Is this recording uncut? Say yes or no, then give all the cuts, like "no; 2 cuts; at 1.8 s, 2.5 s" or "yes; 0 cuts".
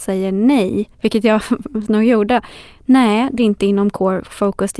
no; 3 cuts; at 0.9 s, 1.9 s, 3.4 s